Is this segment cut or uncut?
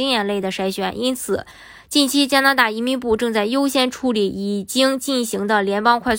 uncut